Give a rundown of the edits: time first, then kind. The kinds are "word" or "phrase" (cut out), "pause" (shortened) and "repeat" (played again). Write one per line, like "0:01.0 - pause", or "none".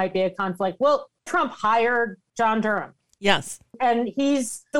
0:01.3 - word

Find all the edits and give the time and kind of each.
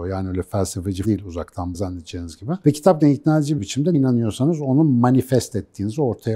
0:01.0 - word
0:01.7 - word
0:03.0 - word
0:03.6 - word
0:03.9 - word

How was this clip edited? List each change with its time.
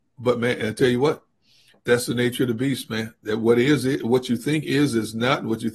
none

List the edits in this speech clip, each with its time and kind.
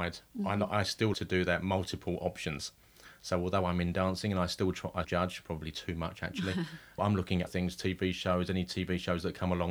0:01.1 - word
0:05.0 - word
0:07.0 - word
0:07.5 - word

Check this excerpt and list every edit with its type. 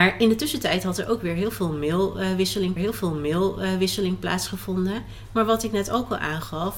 0:02.8 - repeat

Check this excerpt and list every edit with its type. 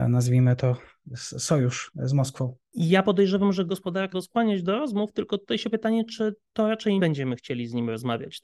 0:03.7 - word
0:04.1 - word
0:05.7 - word
0:07.0 - word

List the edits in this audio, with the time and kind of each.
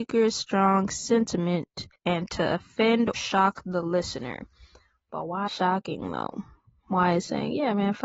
0:01.9 - pause
0:03.1 - word
0:05.5 - phrase

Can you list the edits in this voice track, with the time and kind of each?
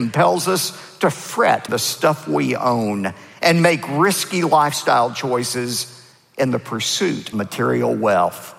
0:01.7 - word
0:07.3 - word

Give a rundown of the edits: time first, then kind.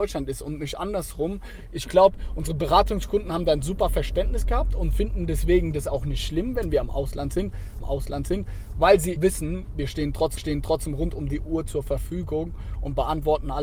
0:07.8 - repeat
0:09.2 - word
0:10.4 - repeat

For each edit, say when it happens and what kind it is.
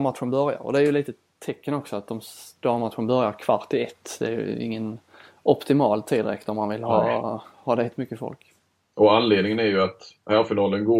none

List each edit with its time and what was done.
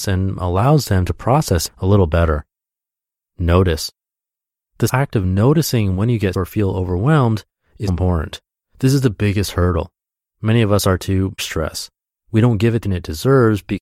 0:01.7 - word
0:04.9 - word
0:06.3 - word
0:07.9 - word
0:11.0 - word
0:11.4 - word
0:12.8 - word

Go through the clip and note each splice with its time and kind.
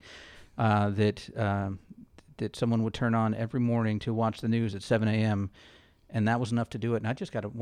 none

